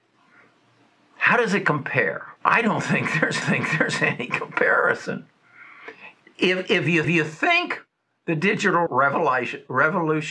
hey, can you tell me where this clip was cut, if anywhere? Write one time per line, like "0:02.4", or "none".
0:02.4
0:03.4
0:06.2
0:07.0
0:08.9